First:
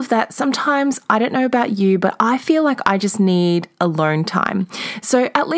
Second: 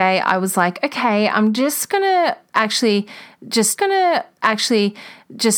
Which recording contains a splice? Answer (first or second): second